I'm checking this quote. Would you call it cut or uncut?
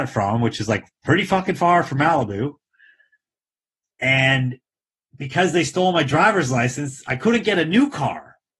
uncut